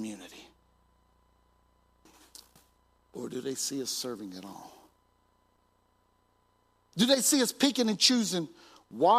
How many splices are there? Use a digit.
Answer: 0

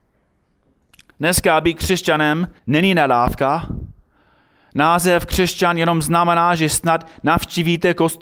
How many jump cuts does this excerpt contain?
1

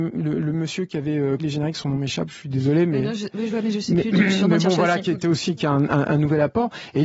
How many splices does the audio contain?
1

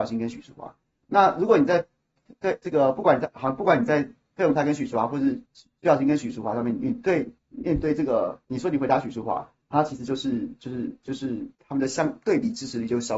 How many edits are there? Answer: 4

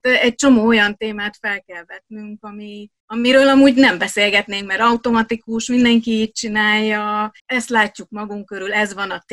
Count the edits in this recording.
2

